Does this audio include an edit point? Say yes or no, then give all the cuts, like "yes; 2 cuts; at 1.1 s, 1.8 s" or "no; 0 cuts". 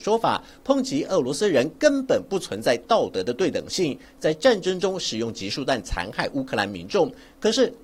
no; 0 cuts